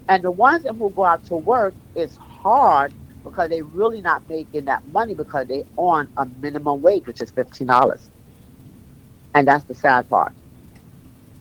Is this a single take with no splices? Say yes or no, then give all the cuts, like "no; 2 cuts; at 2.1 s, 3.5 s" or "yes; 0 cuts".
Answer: yes; 0 cuts